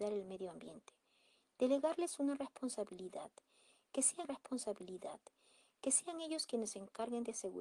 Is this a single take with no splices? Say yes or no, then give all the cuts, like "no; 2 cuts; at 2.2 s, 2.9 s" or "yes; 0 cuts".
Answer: no; 1 cut; at 4.2 s